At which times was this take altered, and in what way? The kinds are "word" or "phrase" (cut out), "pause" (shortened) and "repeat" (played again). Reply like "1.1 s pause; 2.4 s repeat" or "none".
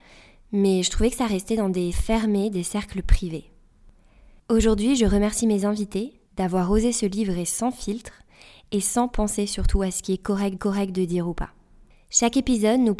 1.9 s word; 6.3 s pause; 10.6 s repeat